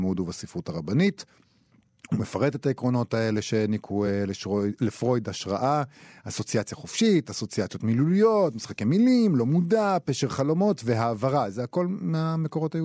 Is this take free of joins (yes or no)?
yes